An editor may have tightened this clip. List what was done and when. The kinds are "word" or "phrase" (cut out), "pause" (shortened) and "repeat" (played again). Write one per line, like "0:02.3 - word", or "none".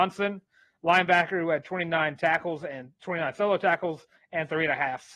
0:03.0 - pause